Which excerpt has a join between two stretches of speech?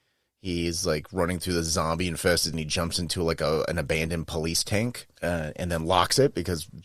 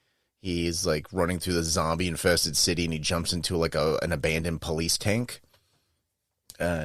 first; 2 cuts; at 2.5 s, 5.2 s

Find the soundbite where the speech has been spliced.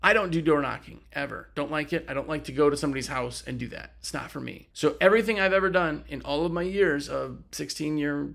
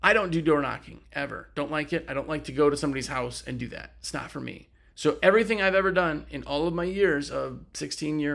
first; 1 cut; at 4.7 s

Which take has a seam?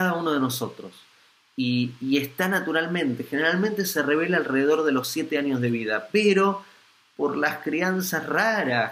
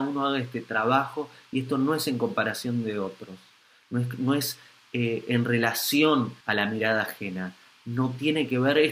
second; 1 cut; at 6.4 s

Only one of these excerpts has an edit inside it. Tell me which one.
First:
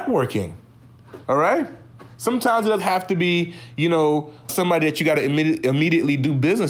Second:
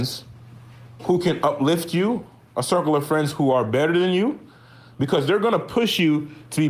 first; 3 cuts; at 1.2 s, 2.8 s, 4.5 s

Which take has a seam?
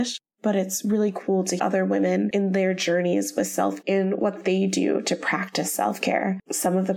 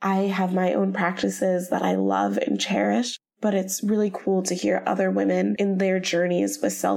first; 2 cuts; at 1.6 s, 3.8 s

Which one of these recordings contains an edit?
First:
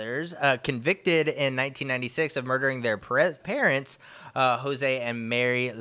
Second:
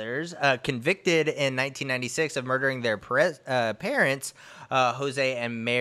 first; 1 cut; at 3.4 s

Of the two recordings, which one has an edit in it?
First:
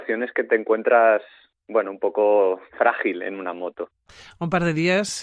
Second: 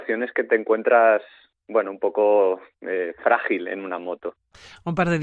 first; 1 cut; at 2.7 s

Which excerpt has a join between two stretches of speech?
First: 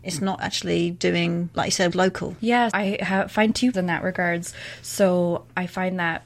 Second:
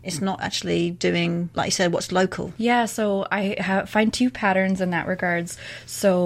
first; 3 cuts; at 1.9 s, 2.7 s, 3.7 s

